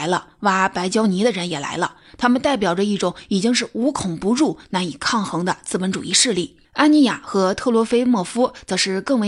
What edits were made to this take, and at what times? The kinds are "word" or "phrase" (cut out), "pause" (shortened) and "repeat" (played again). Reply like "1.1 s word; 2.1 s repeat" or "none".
6.7 s pause